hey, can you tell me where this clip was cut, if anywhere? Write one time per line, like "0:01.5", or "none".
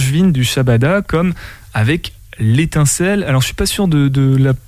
none